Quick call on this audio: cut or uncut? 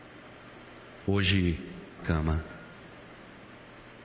cut